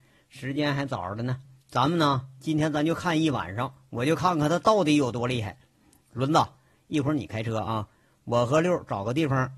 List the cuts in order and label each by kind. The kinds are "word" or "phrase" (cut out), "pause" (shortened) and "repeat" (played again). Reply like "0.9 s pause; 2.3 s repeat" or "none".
none